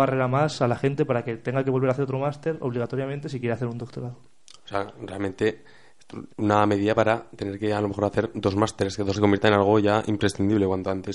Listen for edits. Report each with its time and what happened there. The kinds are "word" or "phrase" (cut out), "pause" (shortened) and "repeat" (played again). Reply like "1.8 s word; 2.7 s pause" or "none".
6.3 s pause; 9.2 s word